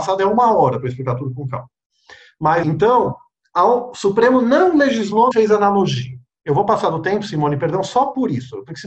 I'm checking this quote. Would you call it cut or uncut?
cut